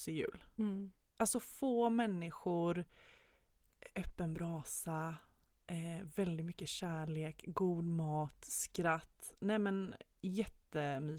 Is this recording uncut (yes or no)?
yes